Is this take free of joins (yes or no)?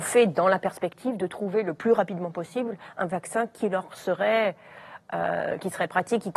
yes